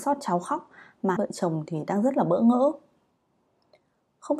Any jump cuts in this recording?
yes; 1 cut; at 1.2 s

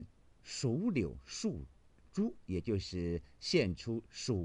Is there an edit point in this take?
no; 0 cuts

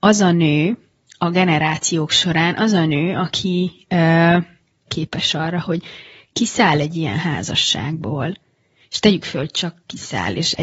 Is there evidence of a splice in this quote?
yes; 1 cut; at 4.9 s

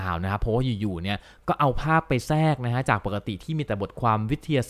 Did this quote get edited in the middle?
no; 0 cuts

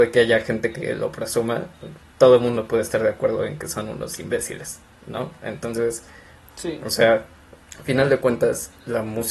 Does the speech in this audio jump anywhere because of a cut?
no; 0 cuts

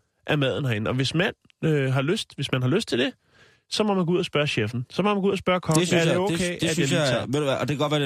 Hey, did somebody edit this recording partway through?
no; 0 cuts

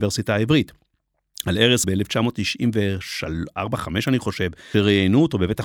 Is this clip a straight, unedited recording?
no; 2 cuts; at 1.8 s, 4.7 s

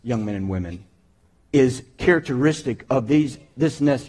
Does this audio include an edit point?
no; 0 cuts

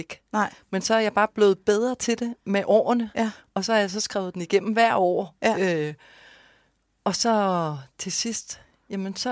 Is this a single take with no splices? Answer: yes; 0 cuts

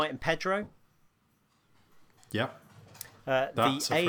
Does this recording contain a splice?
no; 0 cuts

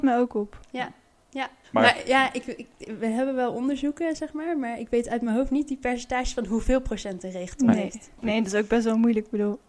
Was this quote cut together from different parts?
yes; 1 cut; at 1.6 s

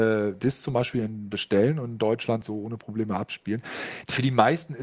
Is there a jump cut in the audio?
no; 0 cuts

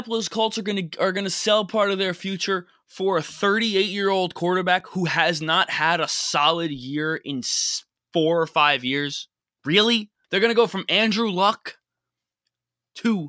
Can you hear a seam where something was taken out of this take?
no; 0 cuts

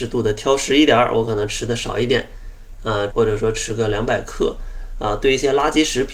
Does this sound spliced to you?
yes; 1 cut; at 3.1 s

